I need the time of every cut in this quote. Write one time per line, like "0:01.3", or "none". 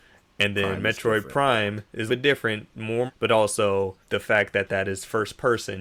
0:02.1
0:03.1
0:04.0